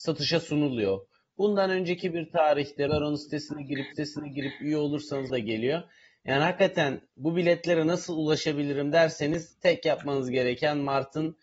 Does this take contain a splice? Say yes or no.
yes